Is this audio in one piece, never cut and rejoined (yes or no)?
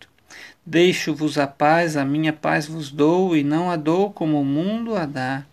yes